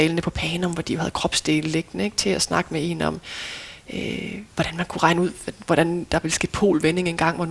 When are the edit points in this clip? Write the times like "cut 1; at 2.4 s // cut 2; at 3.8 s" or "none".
cut 1; at 4.5 s